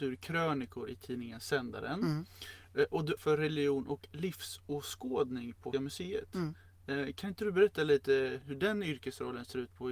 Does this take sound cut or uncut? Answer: cut